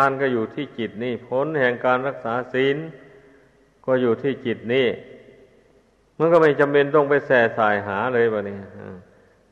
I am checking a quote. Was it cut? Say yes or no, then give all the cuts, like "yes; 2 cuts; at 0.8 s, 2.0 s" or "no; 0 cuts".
no; 0 cuts